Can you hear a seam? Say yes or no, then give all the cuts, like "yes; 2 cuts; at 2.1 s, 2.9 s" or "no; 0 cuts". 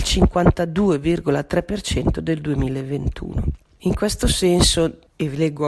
no; 0 cuts